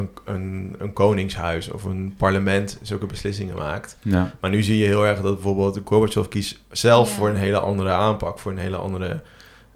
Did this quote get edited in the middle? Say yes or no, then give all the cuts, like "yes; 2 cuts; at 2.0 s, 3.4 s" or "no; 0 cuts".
no; 0 cuts